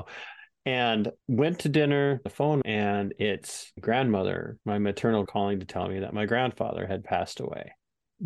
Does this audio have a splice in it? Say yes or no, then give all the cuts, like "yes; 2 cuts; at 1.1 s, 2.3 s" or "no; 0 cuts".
yes; 6 cuts; at 1.2 s, 2.3 s, 2.6 s, 3.8 s, 4.6 s, 5.2 s